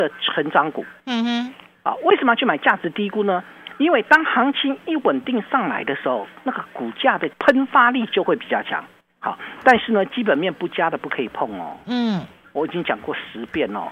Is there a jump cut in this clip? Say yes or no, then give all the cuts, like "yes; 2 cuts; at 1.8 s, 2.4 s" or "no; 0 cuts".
yes; 3 cuts; at 1.0 s, 7.3 s, 9.0 s